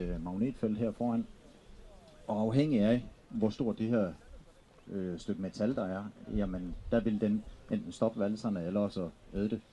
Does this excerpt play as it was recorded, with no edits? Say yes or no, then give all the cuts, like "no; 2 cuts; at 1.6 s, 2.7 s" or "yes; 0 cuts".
yes; 0 cuts